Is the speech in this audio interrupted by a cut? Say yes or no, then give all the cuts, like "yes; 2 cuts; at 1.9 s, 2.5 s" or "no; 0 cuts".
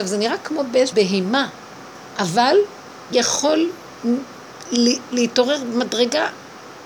yes; 2 cuts; at 0.9 s, 3.1 s